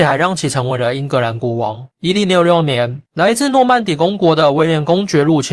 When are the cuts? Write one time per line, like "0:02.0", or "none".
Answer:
0:01.9
0:03.1